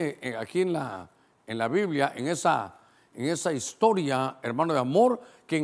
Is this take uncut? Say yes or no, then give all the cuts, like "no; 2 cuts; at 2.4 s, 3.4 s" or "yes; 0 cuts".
yes; 0 cuts